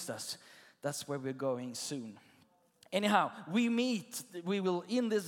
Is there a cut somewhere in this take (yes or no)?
no